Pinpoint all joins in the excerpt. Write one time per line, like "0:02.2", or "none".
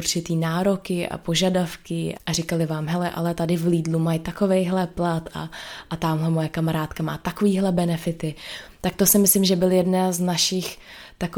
0:02.2